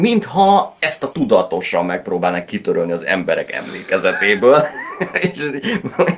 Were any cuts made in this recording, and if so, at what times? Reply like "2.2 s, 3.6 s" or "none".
1.1 s